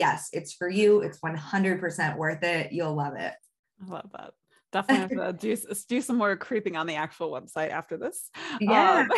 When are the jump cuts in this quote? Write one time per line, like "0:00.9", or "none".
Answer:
none